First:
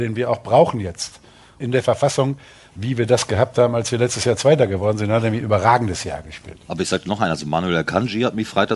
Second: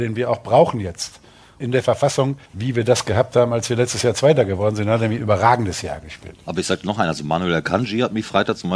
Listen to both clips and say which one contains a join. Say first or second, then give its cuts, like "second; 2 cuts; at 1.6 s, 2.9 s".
second; 1 cut; at 2.5 s